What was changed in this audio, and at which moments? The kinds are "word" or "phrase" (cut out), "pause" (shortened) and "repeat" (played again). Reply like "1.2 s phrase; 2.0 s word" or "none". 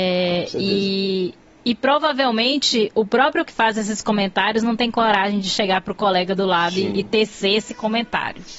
3.4 s word